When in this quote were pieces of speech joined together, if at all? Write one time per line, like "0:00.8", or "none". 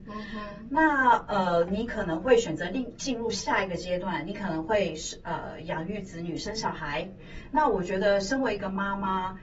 0:01.7